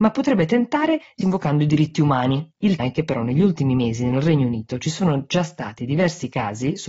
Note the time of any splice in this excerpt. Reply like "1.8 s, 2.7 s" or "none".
1.2 s, 2.8 s